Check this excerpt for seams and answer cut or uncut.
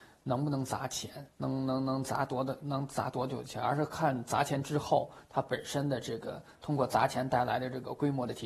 cut